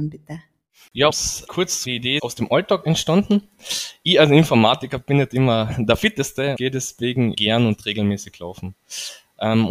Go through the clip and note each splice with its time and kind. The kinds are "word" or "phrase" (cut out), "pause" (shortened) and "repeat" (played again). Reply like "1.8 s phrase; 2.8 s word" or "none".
1.1 s word; 1.5 s word; 1.8 s word; 2.2 s word; 6.5 s word; 7.3 s word